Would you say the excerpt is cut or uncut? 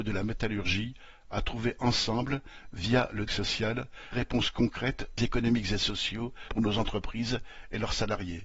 cut